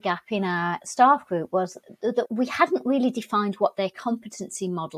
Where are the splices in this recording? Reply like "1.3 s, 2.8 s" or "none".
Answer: none